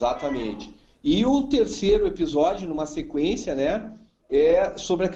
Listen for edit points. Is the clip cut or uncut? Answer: uncut